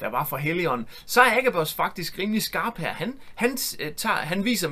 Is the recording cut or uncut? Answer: uncut